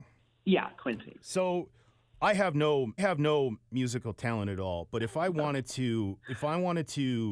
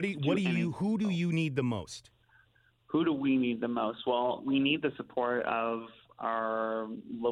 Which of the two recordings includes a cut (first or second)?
first